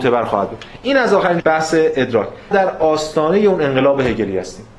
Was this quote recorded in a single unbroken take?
no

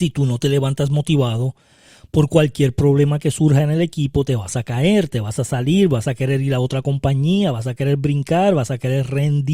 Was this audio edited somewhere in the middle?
no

